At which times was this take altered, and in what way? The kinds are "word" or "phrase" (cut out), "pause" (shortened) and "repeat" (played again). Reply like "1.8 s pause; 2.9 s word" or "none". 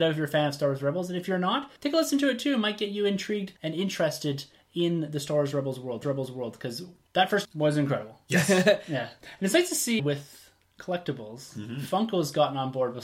1.8 s pause; 3.6 s pause; 6.0 s repeat; 7.4 s word; 10.0 s word